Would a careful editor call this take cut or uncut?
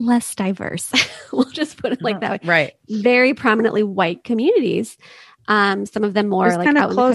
uncut